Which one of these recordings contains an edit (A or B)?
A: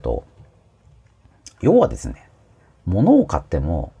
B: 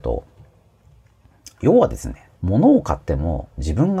B